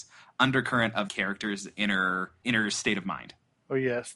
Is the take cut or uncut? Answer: cut